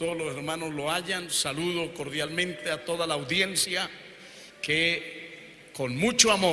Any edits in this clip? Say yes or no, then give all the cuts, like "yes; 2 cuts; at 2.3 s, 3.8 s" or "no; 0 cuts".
yes; 1 cut; at 4.5 s